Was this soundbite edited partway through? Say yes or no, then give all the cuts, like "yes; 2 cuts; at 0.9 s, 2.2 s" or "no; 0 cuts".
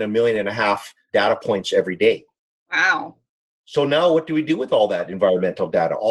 no; 0 cuts